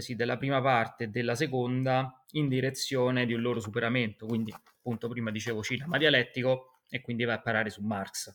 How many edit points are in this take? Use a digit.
0